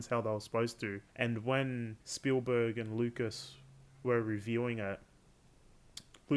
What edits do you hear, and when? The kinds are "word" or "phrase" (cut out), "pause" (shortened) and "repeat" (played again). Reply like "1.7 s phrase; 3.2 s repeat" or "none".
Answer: 1.1 s pause; 2.0 s pause